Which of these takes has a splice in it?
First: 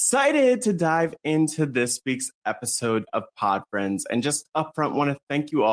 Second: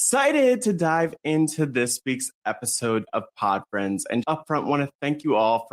second; 1 cut; at 4.2 s

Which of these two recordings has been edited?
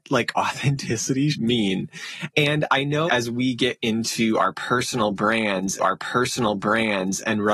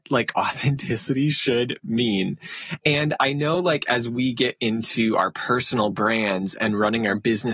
first; 3 cuts; at 1.3 s, 3.1 s, 5.8 s

